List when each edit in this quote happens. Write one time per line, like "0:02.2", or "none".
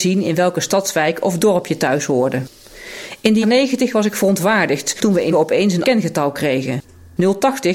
0:03.4
0:05.3
0:05.8